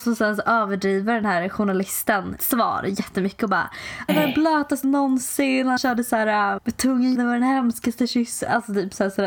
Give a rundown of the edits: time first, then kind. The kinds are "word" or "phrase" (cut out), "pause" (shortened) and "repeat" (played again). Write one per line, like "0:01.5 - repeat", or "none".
0:02.4 - word
0:04.1 - word
0:04.8 - word
0:05.8 - word
0:06.6 - word
0:07.1 - word

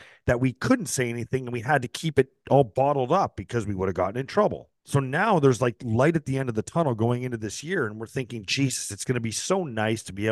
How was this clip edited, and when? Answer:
0:04.8 - pause

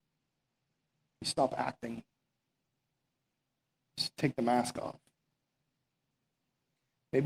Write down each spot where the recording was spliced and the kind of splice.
none

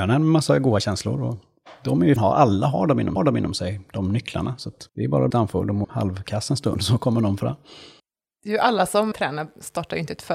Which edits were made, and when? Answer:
0:02.2 - phrase
0:03.2 - repeat
0:04.9 - pause
0:05.3 - phrase
0:05.8 - word
0:08.0 - pause
0:09.1 - word

